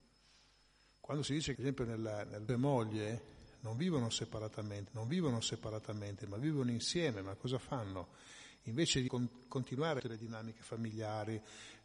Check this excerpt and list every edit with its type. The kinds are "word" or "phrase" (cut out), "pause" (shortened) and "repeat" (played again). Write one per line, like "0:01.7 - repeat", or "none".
0:01.5 - phrase
0:02.5 - phrase
0:04.9 - repeat
0:09.1 - word
0:10.0 - phrase